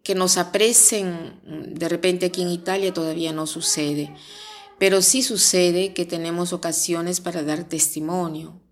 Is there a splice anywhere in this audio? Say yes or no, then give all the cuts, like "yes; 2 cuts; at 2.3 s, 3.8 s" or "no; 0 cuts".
no; 0 cuts